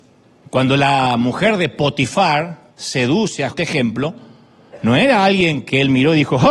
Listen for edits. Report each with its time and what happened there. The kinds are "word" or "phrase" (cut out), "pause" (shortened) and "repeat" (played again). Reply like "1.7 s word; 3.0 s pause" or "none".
2.7 s pause; 3.5 s phrase